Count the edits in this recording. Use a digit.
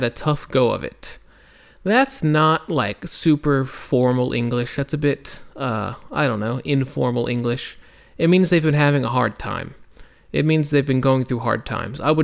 0